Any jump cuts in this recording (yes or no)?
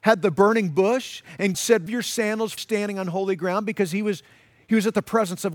yes